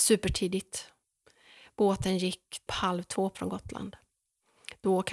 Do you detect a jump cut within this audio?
yes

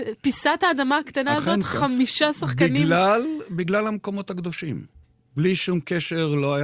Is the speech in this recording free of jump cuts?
yes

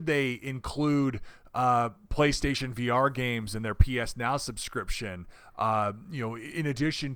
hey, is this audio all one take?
yes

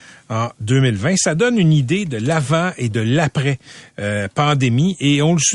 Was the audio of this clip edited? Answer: no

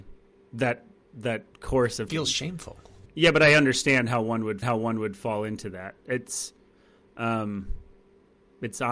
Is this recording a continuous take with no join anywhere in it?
no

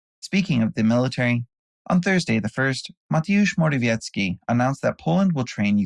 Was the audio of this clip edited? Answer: no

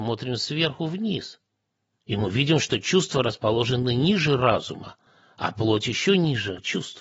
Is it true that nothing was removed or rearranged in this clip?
yes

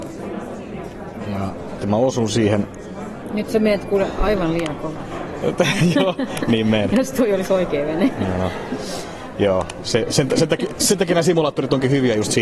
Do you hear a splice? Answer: yes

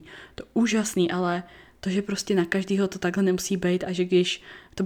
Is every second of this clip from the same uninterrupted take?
yes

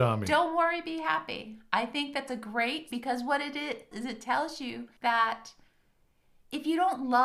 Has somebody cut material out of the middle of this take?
yes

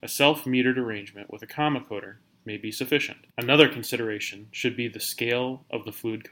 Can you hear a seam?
yes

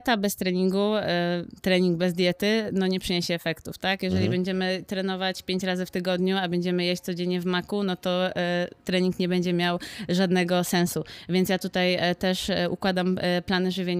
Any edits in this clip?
no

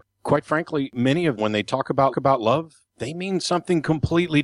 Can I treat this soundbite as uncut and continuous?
no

